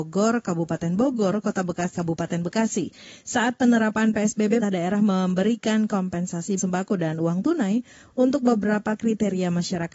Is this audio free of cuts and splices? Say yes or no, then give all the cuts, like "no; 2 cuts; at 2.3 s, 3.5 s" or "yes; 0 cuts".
no; 3 cuts; at 2.0 s, 4.6 s, 6.6 s